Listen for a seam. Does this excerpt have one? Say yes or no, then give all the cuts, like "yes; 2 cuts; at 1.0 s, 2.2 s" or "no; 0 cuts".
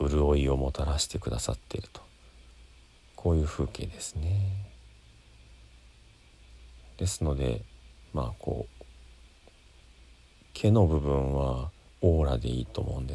yes; 1 cut; at 11.9 s